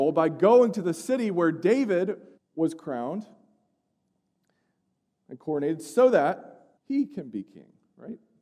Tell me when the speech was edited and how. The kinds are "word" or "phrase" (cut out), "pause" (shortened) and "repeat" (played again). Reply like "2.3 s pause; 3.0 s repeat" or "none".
2.4 s pause; 6.8 s pause